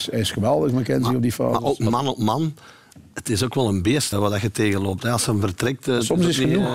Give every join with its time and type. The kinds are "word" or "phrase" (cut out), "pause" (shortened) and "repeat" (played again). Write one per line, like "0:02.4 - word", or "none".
0:04.1 - word